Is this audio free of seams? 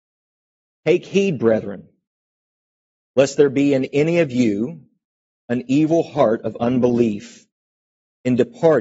yes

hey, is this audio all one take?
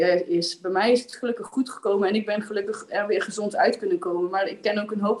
yes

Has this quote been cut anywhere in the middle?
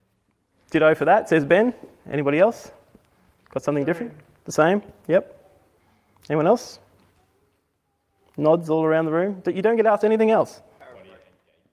no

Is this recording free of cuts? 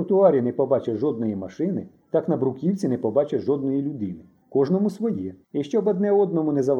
no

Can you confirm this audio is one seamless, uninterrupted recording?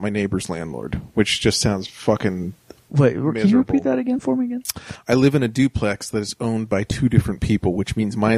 yes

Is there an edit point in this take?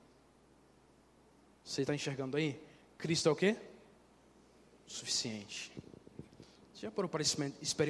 no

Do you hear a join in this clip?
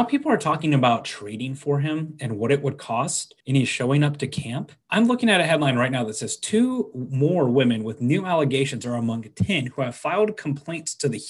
yes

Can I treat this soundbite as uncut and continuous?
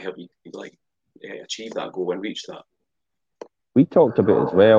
no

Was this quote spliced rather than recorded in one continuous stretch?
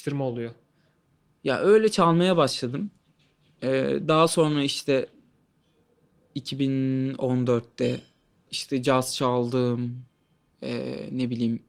yes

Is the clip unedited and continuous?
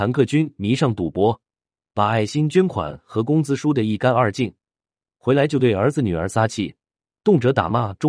yes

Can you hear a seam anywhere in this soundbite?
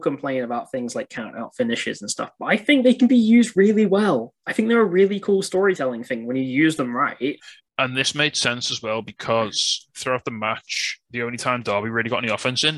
yes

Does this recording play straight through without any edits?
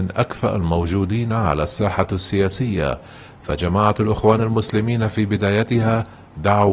yes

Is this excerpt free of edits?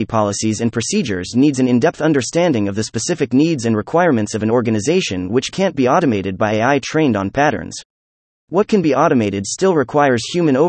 yes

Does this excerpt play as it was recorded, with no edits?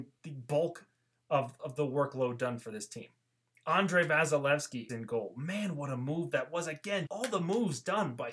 no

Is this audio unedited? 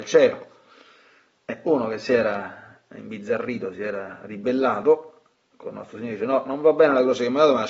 yes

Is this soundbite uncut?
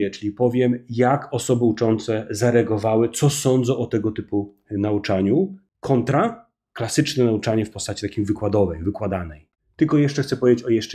yes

